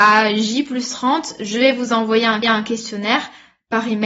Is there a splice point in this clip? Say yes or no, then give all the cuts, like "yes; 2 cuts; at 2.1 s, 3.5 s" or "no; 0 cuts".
yes; 1 cut; at 2.4 s